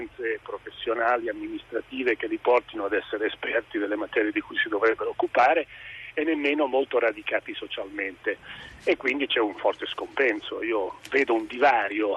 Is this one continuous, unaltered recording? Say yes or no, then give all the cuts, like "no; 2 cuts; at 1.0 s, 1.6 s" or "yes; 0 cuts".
yes; 0 cuts